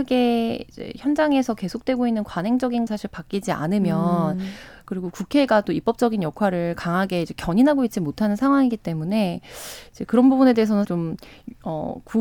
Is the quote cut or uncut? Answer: cut